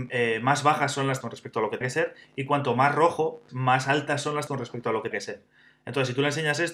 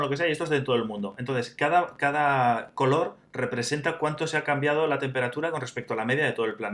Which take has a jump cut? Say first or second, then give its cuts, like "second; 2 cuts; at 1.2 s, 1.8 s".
first; 5 cuts; at 1.2 s, 1.8 s, 3.5 s, 4.5 s, 5.1 s